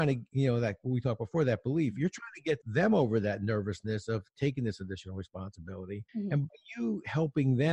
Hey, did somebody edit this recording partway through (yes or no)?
yes